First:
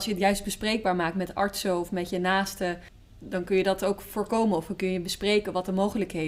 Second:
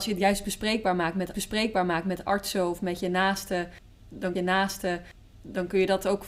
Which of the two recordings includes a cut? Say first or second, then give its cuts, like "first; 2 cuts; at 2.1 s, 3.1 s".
second; 2 cuts; at 1.3 s, 4.4 s